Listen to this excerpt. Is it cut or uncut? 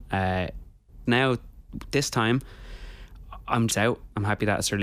cut